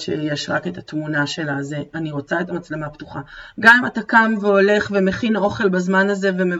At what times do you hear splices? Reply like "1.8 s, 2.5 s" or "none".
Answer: none